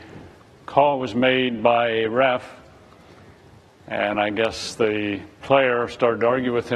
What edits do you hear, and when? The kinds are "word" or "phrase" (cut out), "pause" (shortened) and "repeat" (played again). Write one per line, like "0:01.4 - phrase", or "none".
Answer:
none